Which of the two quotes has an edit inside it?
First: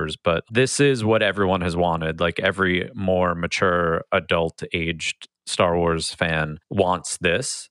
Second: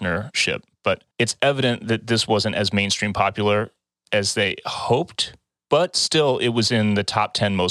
second; 1 cut; at 1.1 s

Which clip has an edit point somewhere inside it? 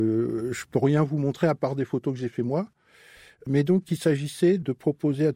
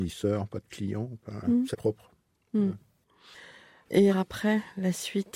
second; 3 cuts; at 1.4 s, 1.7 s, 4.1 s

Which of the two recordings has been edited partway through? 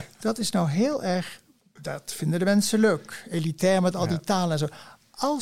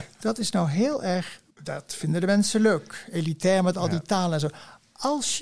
second; 1 cut; at 1.5 s

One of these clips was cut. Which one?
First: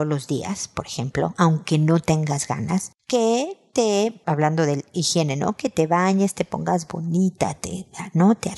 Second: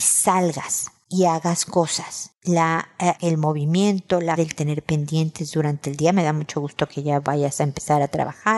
second; 1 cut; at 4.4 s

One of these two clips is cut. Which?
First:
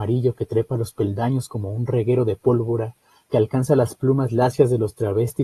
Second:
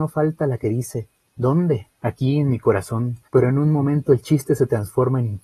second; 2 cuts; at 1.9 s, 3.3 s

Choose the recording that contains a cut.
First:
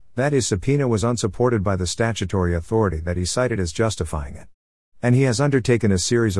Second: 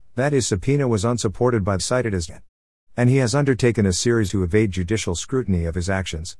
second; 3 cuts; at 1.8 s, 2.3 s, 4.3 s

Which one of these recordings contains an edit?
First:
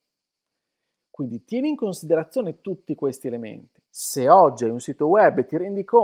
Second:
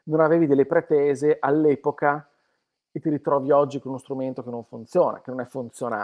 first; 1 cut; at 3.9 s

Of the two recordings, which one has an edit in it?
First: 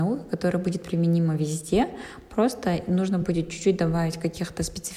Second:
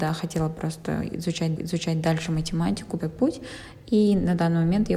second; 2 cuts; at 1.6 s, 3.0 s

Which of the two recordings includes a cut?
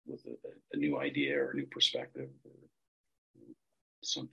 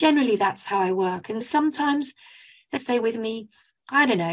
second; 2 cuts; at 1.4 s, 2.8 s

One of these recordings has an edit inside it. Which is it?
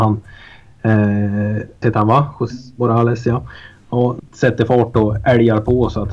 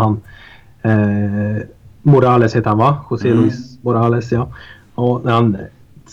first; 3 cuts; at 1.8 s, 2.5 s, 4.2 s

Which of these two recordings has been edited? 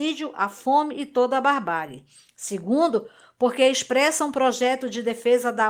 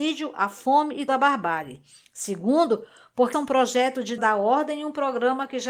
second; 3 cuts; at 1.1 s, 3.3 s, 4.2 s

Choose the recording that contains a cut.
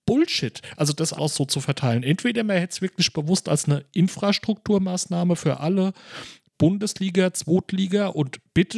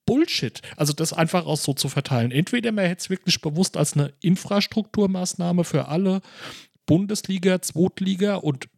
first; 1 cut; at 1.2 s

